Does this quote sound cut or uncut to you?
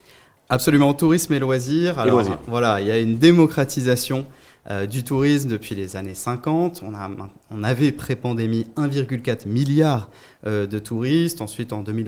uncut